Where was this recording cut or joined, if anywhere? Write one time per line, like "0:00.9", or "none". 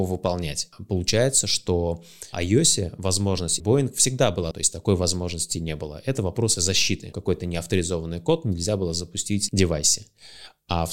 0:02.3
0:03.6
0:04.5
0:07.1
0:09.5